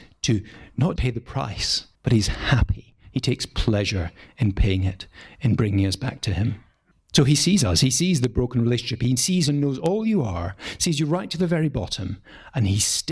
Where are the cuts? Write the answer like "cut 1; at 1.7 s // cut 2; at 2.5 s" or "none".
cut 1; at 1.0 s // cut 2; at 1.9 s // cut 3; at 6.9 s